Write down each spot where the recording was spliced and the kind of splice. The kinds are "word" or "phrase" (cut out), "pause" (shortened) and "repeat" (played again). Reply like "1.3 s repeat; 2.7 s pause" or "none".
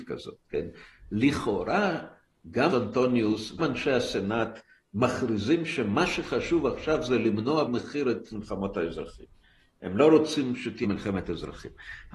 2.7 s word; 3.6 s word; 7.7 s word; 8.3 s word; 10.8 s word